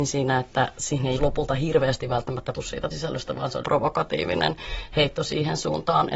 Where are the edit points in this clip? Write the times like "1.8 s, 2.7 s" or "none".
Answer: 1.2 s, 2.5 s, 2.9 s, 3.6 s